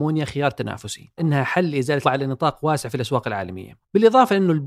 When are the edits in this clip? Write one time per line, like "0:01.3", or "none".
0:01.2
0:02.0